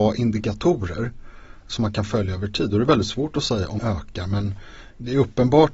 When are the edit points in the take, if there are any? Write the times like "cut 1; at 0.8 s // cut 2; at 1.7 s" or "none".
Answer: cut 1; at 3.8 s